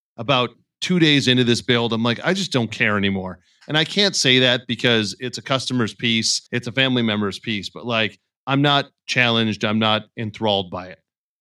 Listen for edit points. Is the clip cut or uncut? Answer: cut